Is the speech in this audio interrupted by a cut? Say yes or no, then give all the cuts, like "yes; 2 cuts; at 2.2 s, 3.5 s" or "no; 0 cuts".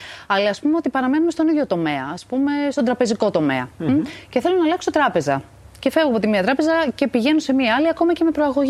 no; 0 cuts